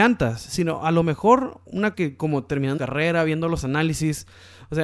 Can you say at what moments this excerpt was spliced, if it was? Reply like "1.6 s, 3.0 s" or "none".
1.9 s, 2.8 s